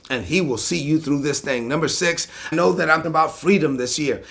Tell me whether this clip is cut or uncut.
cut